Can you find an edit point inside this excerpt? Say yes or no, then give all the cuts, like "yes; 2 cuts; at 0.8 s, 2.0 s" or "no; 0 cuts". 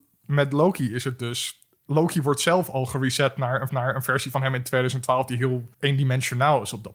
yes; 2 cuts; at 3.7 s, 5.7 s